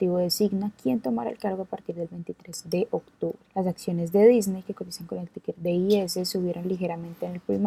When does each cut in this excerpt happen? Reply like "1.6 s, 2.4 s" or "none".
3.4 s